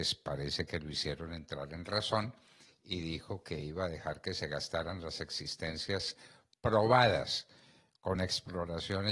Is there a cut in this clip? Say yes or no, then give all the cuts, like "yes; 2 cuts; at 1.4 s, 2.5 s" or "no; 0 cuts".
no; 0 cuts